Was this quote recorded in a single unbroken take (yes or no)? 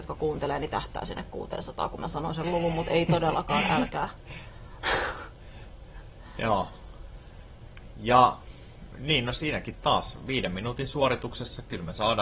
yes